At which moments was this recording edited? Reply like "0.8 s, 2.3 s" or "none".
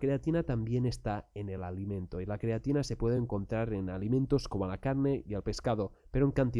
none